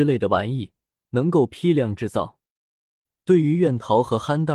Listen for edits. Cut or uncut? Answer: uncut